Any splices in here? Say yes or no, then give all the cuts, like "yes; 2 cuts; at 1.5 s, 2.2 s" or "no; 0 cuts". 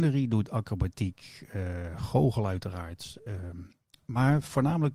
no; 0 cuts